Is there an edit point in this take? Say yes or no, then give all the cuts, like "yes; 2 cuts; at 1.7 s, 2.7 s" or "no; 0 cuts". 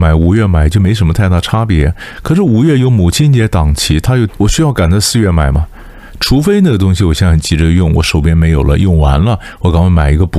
yes; 1 cut; at 4.3 s